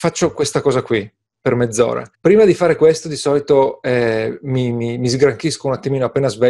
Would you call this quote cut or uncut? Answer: cut